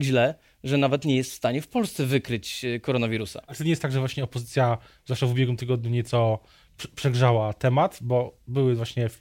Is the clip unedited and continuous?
yes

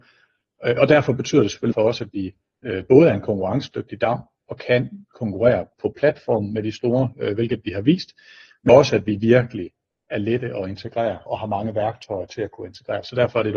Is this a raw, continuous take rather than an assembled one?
no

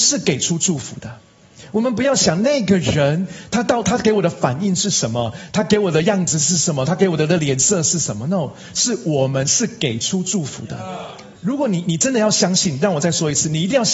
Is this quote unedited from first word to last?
no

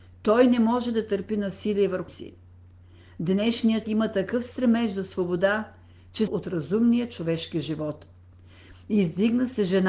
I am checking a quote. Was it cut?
yes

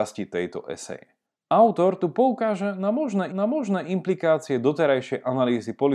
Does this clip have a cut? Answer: yes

